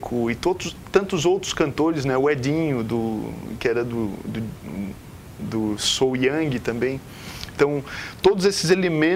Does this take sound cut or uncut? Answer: uncut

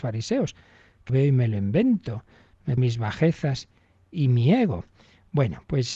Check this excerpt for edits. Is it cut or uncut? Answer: cut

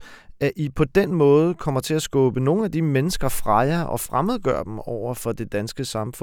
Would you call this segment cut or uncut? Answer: uncut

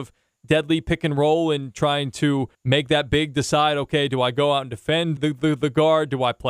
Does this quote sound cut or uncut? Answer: cut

